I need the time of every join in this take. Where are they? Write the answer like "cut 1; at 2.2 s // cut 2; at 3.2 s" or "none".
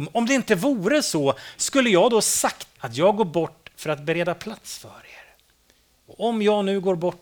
cut 1; at 2.8 s